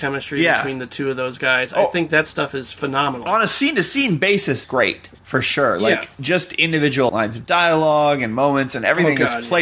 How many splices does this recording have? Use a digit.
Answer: 3